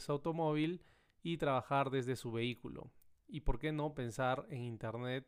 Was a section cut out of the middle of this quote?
no; 0 cuts

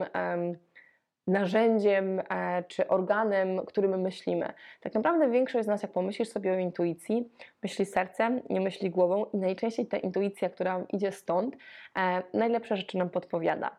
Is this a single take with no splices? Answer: yes; 0 cuts

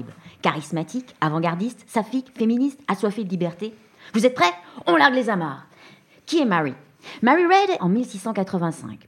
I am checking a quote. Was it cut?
yes; 1 cut; at 7.8 s

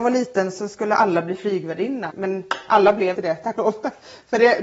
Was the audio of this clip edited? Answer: yes; 3 cuts; at 2.1 s, 3.1 s, 3.5 s

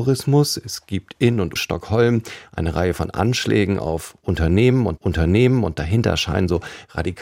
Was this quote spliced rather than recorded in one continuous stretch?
yes; 2 cuts; at 1.6 s, 5.0 s

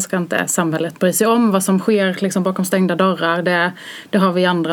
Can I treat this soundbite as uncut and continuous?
yes; 0 cuts

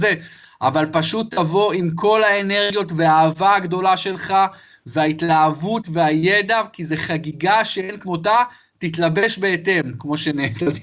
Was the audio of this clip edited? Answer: no; 0 cuts

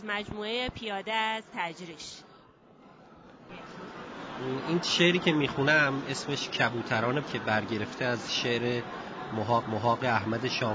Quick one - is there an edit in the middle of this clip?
yes; 2 cuts; at 7.2 s, 9.6 s

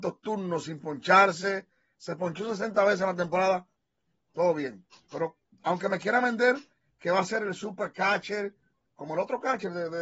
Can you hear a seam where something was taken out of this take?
no; 0 cuts

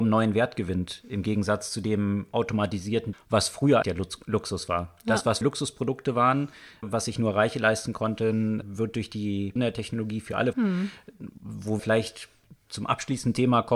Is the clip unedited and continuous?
no; 8 cuts; at 3.1 s, 3.8 s, 5.4 s, 6.8 s, 8.6 s, 9.6 s, 10.5 s, 11.8 s

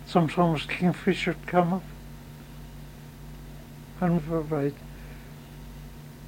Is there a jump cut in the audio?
yes; 1 cut; at 4.2 s

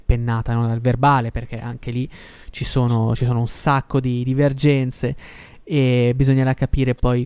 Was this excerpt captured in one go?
yes; 0 cuts

